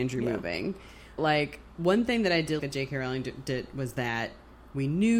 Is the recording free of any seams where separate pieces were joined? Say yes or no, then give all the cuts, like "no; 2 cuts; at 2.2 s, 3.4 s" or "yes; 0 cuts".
no; 2 cuts; at 1.2 s, 2.6 s